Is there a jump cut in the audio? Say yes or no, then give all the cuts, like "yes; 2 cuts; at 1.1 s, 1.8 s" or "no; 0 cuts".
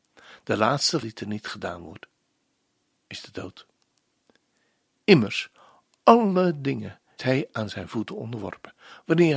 yes; 2 cuts; at 1.0 s, 7.2 s